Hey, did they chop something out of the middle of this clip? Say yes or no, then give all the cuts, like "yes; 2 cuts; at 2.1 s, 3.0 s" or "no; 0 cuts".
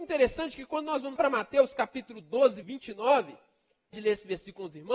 yes; 3 cuts; at 1.2 s, 2.6 s, 3.9 s